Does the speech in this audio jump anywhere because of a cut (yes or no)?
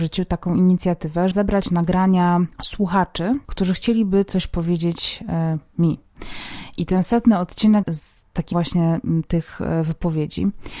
yes